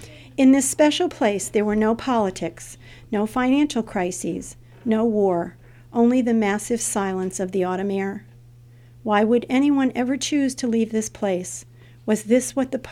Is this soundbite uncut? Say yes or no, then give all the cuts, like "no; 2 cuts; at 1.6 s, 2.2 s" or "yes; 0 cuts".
yes; 0 cuts